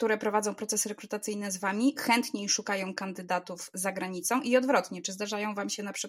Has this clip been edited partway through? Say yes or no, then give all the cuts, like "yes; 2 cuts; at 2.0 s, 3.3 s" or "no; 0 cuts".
no; 0 cuts